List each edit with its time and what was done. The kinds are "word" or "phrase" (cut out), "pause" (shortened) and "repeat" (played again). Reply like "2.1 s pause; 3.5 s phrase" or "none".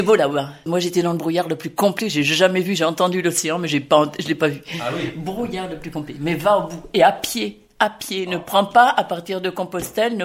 none